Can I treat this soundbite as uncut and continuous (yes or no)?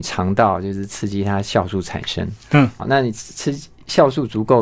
no